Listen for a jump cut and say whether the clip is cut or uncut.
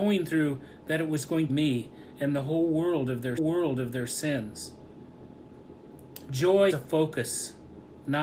cut